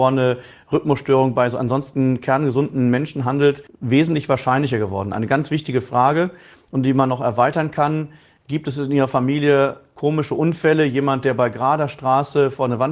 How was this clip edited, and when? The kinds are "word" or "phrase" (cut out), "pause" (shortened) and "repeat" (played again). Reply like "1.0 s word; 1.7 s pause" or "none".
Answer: 3.7 s pause